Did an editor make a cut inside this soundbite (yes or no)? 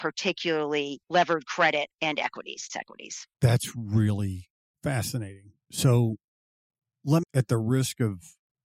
yes